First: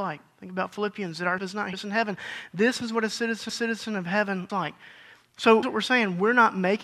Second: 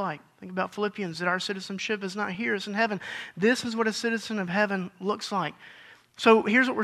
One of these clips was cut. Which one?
first; 5 cuts; at 1.4 s, 1.7 s, 3.5 s, 4.5 s, 5.6 s

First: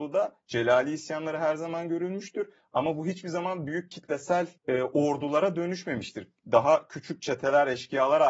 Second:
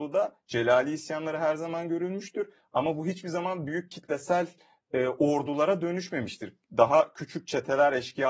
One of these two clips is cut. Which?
first; 1 cut; at 4.6 s

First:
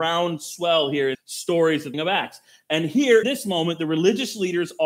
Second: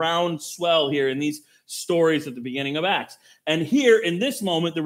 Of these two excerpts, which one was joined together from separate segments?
first; 3 cuts; at 1.1 s, 1.9 s, 3.2 s

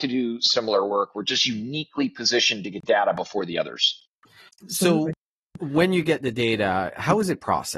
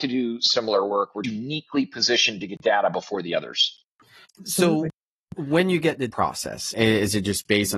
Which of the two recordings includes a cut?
second; 2 cuts; at 1.2 s, 6.1 s

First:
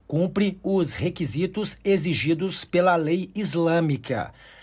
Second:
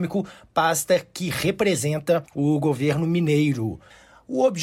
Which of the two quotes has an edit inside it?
second; 1 cut; at 2.3 s

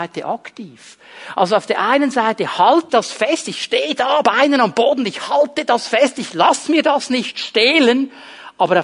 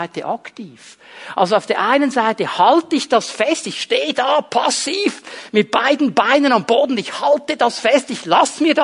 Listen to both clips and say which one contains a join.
first; 2 cuts; at 2.9 s, 4.2 s

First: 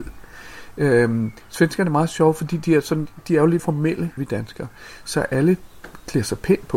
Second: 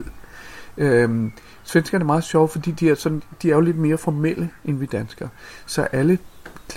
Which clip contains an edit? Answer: first; 3 cuts; at 1.4 s, 3.6 s, 4.2 s

